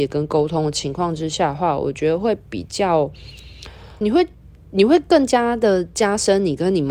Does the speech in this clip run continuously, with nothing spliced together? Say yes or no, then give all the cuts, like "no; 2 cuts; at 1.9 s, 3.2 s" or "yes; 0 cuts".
no; 1 cut; at 4.0 s